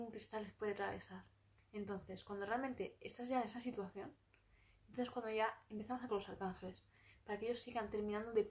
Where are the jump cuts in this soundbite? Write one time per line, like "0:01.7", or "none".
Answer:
0:06.1